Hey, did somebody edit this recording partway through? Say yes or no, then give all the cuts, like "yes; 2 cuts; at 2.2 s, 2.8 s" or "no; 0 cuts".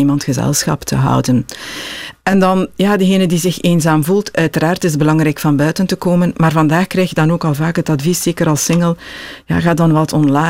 no; 0 cuts